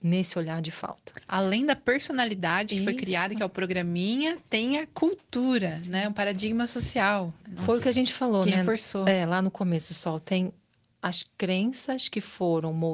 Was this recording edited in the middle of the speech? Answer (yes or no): no